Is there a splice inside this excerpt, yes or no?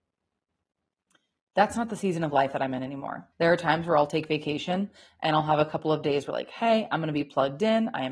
yes